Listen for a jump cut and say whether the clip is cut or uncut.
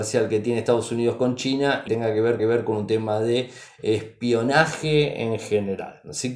cut